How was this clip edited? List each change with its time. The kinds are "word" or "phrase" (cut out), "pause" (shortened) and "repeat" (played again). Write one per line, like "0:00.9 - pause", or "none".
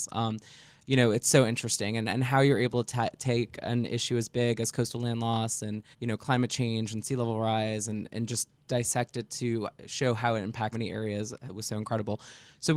0:05.9 - pause
0:08.1 - word
0:10.7 - word